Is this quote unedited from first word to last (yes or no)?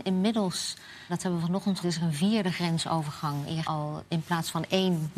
no